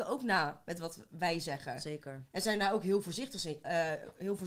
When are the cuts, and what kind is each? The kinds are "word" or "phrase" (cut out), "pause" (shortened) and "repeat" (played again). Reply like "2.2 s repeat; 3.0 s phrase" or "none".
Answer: none